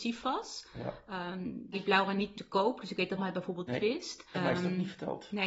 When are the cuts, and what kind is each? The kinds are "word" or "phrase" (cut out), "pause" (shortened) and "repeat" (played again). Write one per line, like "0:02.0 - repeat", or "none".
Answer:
0:01.7 - word
0:02.3 - word
0:03.2 - word
0:03.7 - word
0:04.3 - word